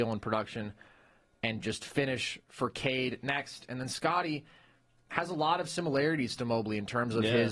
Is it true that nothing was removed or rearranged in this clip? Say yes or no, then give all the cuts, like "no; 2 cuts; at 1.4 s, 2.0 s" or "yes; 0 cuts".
yes; 0 cuts